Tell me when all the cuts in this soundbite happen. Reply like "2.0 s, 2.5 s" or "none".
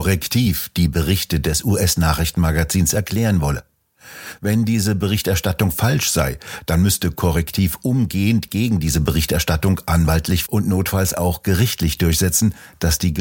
10.5 s